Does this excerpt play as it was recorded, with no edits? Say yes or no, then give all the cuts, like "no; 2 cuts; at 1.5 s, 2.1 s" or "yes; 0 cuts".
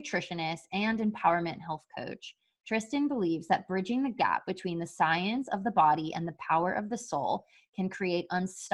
yes; 0 cuts